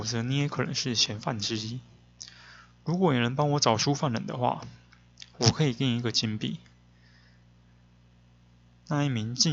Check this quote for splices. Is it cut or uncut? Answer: uncut